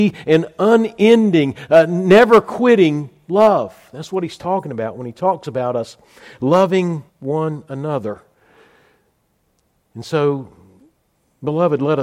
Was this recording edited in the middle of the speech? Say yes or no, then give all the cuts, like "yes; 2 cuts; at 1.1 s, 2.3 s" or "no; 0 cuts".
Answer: yes; 1 cut; at 7.1 s